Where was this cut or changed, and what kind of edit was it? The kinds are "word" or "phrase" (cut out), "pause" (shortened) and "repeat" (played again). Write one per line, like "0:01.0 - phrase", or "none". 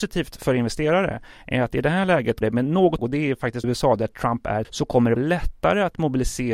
0:02.4 - word
0:03.0 - word
0:03.6 - word
0:04.6 - word
0:05.2 - word